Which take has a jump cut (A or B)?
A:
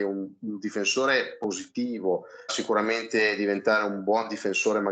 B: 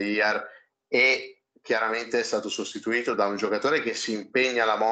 A